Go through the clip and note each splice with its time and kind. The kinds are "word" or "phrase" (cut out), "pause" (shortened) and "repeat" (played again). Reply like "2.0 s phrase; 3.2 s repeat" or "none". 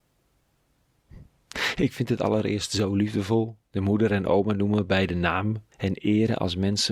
3.6 s pause; 5.7 s pause

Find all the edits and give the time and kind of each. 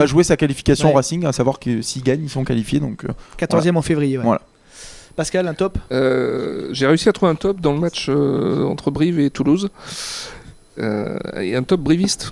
none

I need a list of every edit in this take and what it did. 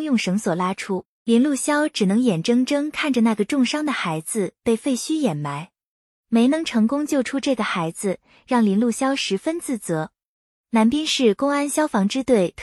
none

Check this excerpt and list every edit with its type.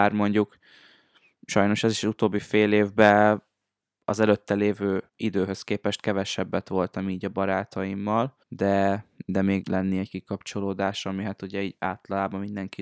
5.1 s pause; 8.4 s pause; 9.6 s phrase

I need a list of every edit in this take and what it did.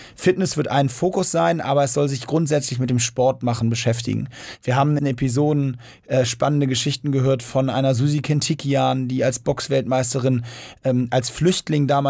5.0 s phrase

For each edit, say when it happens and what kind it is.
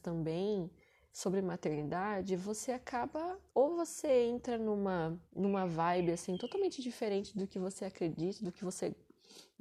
3.5 s pause; 5.2 s pause

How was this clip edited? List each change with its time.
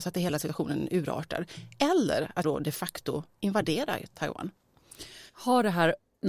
2.4 s word; 5.3 s pause

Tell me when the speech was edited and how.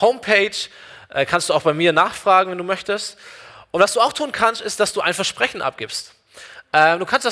none

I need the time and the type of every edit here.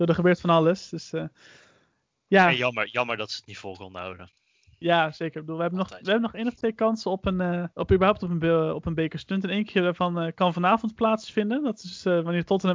7.7 s pause

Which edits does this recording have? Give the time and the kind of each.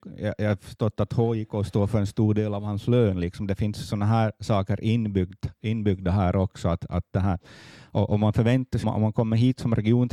8.8 s word

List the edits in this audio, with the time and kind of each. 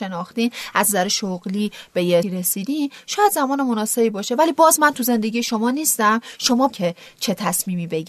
2.2 s word; 6.7 s phrase

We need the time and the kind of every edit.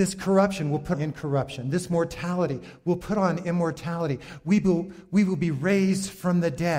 0.9 s word

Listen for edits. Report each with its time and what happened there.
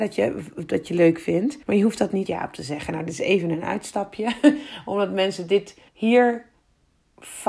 1.6 s pause; 2.3 s word; 5.9 s pause

